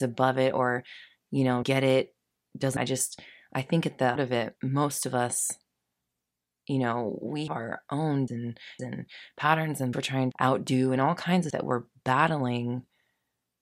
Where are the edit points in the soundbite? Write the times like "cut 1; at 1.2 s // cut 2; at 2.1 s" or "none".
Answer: cut 1; at 1.6 s // cut 2; at 2.8 s // cut 3; at 4.2 s // cut 4; at 7.5 s // cut 5; at 8.3 s // cut 6; at 8.8 s // cut 7; at 9.9 s // cut 8; at 10.3 s // cut 9; at 11.5 s